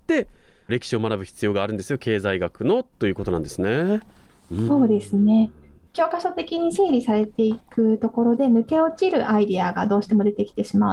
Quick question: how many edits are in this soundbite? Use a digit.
1